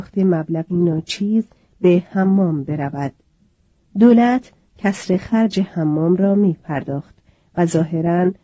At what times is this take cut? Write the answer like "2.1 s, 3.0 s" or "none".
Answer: none